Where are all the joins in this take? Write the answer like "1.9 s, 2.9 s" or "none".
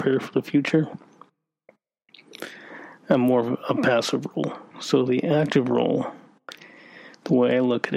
4.7 s